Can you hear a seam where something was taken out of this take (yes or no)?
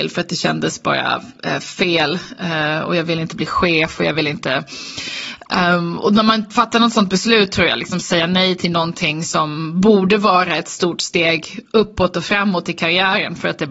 no